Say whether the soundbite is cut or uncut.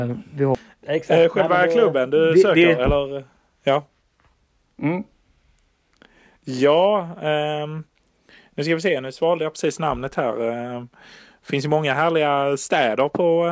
uncut